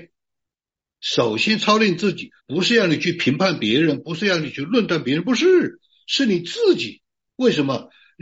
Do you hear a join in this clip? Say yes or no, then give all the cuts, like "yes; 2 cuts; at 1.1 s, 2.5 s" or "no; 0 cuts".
yes; 1 cut; at 2.4 s